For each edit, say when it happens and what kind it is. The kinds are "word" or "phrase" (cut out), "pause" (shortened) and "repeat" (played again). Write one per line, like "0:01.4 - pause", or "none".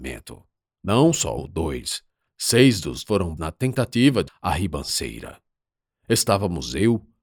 0:01.4 - word
0:02.3 - word
0:03.0 - word
0:03.4 - word
0:04.3 - word